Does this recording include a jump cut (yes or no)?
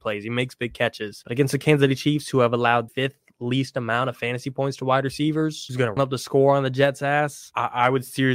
yes